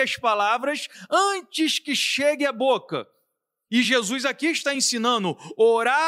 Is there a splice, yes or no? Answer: no